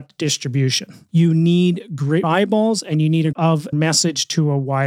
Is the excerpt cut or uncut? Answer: cut